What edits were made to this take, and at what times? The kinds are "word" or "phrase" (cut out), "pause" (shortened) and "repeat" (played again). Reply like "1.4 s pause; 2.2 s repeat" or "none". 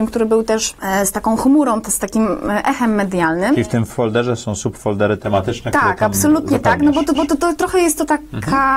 7.1 s repeat